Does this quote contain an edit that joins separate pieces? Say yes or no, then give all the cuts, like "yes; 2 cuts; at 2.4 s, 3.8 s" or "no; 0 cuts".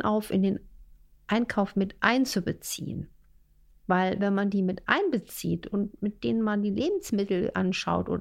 no; 0 cuts